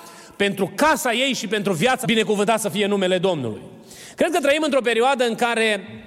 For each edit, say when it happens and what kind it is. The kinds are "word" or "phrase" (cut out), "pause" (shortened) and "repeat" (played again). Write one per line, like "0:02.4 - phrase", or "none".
0:02.0 - word